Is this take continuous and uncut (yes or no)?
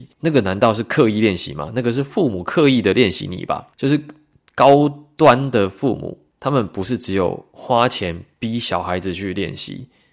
no